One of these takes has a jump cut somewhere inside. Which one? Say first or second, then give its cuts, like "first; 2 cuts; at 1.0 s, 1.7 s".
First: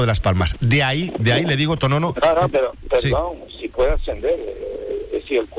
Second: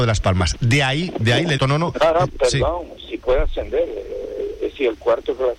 second; 2 cuts; at 1.6 s, 2.3 s